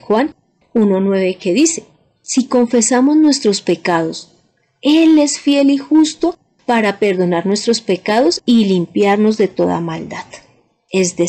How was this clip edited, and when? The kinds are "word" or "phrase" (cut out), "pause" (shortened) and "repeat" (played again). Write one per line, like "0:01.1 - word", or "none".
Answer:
none